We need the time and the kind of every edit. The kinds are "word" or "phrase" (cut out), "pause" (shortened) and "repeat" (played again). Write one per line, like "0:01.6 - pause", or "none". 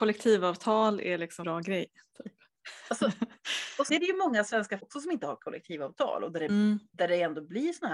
0:01.4 - word
0:03.9 - word
0:04.8 - word